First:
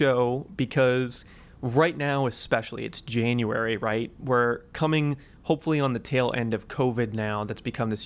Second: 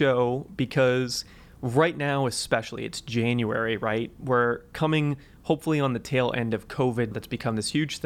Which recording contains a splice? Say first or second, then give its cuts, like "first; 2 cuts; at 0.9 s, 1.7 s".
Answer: second; 1 cut; at 7.1 s